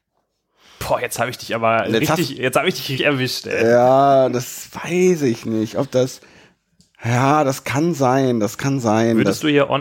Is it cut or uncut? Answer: cut